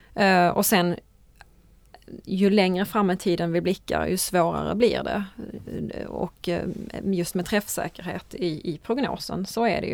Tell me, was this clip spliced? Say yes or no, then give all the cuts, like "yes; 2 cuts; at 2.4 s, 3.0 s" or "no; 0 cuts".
no; 0 cuts